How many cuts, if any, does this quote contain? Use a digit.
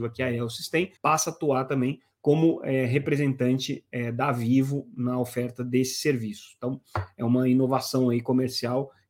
1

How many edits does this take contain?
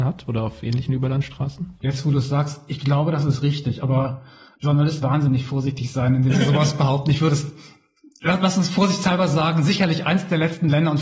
2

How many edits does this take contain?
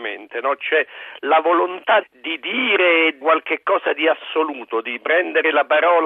2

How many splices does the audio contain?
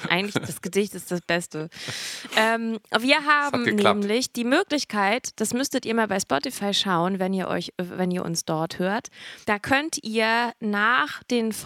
1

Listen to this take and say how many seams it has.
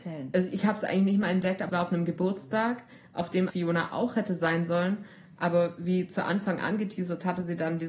2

